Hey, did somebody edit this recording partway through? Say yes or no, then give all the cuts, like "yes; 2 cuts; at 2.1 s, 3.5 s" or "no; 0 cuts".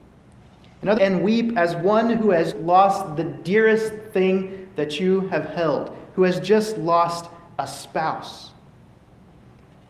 yes; 2 cuts; at 1.0 s, 2.5 s